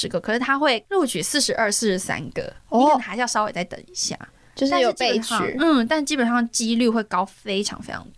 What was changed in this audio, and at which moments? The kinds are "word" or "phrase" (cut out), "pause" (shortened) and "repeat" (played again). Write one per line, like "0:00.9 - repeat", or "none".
none